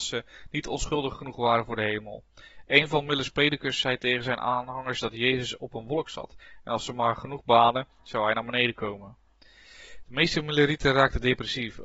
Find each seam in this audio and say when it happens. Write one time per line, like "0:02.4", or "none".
none